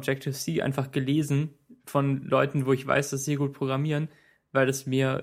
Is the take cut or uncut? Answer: uncut